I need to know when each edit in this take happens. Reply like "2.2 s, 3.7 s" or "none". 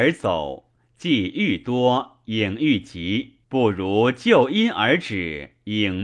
3.4 s